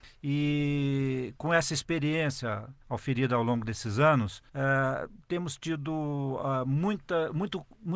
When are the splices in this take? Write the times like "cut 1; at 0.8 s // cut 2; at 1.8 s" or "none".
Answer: cut 1; at 2.8 s // cut 2; at 4.5 s